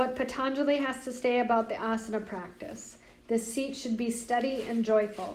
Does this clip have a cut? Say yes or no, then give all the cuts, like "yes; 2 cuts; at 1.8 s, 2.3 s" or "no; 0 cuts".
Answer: no; 0 cuts